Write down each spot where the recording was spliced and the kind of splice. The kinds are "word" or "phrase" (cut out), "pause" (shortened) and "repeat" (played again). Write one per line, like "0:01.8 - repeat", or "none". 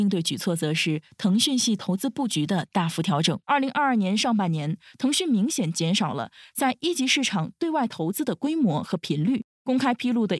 0:03.4 - pause
0:09.5 - pause